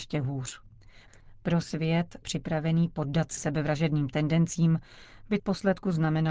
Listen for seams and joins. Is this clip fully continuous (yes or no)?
no